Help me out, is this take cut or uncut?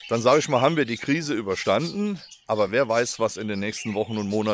uncut